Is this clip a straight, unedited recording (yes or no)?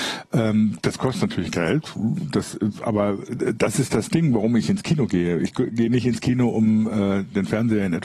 yes